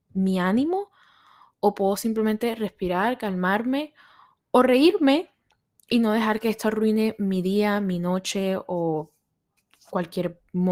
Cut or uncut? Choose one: uncut